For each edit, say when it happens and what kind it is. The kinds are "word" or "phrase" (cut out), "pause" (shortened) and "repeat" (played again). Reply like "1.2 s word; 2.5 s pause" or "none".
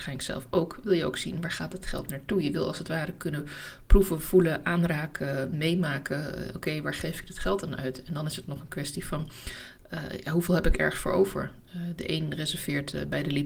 none